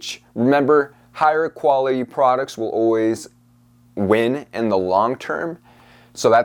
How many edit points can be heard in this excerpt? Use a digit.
0